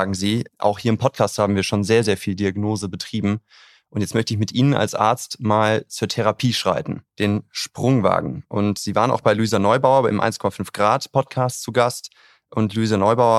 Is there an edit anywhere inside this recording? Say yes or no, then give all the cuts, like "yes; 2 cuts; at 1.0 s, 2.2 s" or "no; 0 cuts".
yes; 1 cut; at 7.1 s